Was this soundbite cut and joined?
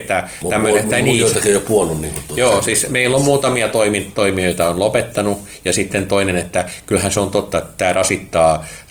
no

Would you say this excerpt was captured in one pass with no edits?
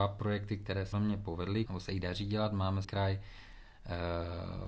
no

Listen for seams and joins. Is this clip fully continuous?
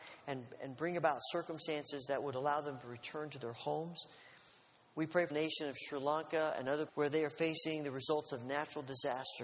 no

